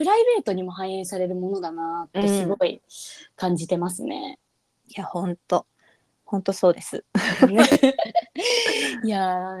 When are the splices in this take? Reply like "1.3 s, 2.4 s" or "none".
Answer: 4.5 s